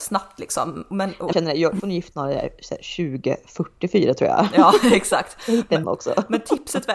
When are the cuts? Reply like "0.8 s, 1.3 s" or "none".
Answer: 1.3 s, 1.8 s, 2.1 s, 5.8 s